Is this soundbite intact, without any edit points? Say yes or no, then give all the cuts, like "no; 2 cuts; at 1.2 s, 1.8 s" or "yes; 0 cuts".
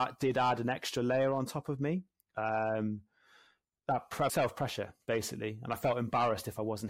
no; 1 cut; at 4.3 s